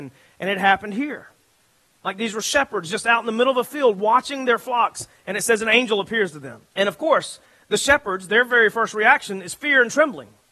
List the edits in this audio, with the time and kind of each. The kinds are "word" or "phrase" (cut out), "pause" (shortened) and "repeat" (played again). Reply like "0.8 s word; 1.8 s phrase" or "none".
6.7 s pause